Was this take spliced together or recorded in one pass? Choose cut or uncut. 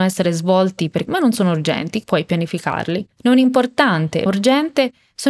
cut